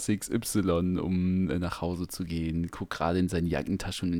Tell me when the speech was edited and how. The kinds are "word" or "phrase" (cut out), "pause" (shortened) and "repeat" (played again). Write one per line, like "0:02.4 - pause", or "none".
none